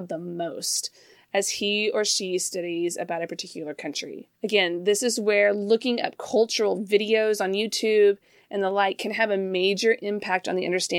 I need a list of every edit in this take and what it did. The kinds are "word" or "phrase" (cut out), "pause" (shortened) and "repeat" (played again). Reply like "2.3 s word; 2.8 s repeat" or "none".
4.3 s pause